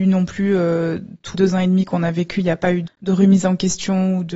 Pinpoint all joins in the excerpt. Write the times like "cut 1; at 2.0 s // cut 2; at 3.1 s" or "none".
cut 1; at 1.3 s // cut 2; at 2.8 s